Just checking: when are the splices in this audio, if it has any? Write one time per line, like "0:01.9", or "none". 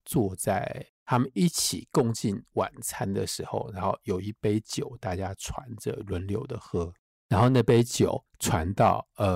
0:08.3